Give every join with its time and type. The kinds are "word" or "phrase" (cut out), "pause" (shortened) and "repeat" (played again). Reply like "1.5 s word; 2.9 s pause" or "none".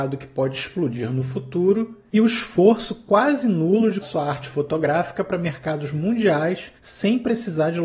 2.1 s pause; 4.0 s word; 6.8 s pause